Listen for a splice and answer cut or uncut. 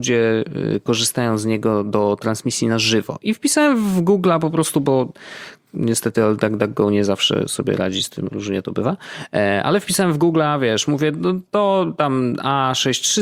uncut